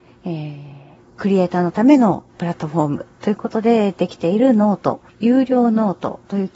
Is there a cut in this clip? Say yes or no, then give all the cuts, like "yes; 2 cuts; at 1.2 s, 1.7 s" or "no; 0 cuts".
yes; 2 cuts; at 2.3 s, 5.1 s